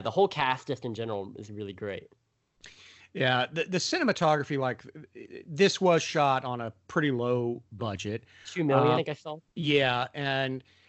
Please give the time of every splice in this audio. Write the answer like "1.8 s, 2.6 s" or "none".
8.9 s, 9.5 s